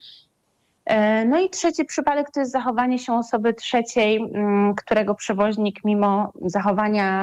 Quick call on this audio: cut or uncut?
uncut